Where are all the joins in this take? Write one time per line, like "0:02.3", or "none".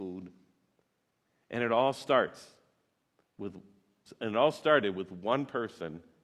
none